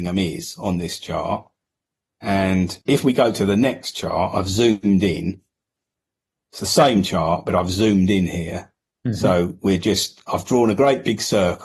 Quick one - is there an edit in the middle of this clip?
yes; 1 cut; at 2.8 s

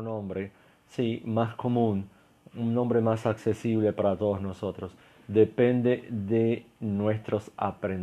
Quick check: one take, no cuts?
yes; 0 cuts

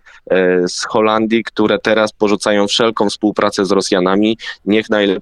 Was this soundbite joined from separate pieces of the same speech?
no; 0 cuts

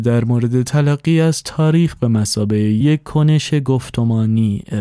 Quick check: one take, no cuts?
yes; 0 cuts

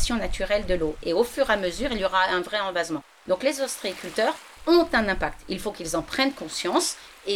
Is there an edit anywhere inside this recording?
no; 0 cuts

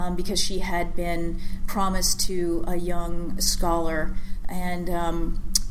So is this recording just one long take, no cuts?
yes; 0 cuts

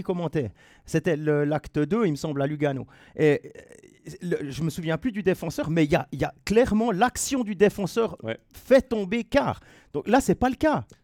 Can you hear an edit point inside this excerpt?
no; 0 cuts

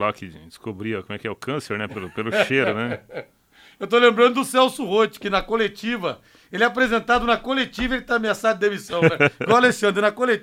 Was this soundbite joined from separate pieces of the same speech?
no; 0 cuts

